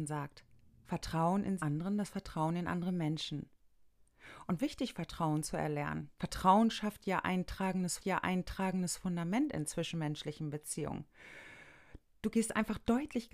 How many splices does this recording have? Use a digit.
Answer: 4